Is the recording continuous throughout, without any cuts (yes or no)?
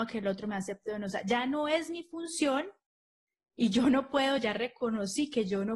yes